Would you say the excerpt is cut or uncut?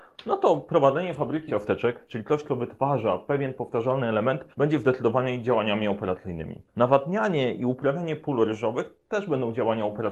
cut